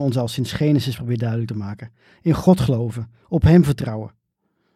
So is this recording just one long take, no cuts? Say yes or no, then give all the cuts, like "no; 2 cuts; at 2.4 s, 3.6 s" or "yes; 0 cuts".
yes; 0 cuts